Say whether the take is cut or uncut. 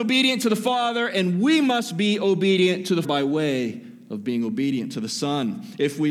cut